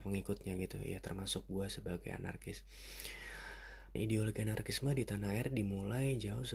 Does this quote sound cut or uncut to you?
cut